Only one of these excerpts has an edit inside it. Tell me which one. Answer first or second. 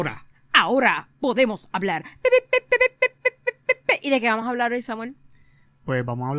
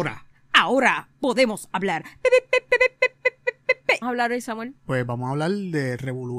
second